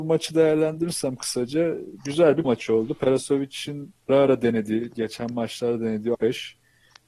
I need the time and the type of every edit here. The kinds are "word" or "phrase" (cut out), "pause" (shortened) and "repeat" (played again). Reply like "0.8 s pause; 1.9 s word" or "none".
2.4 s word; 4.1 s word; 6.1 s word